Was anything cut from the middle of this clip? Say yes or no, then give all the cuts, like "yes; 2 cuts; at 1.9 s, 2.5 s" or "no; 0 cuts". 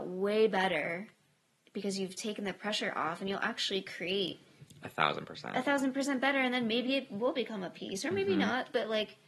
no; 0 cuts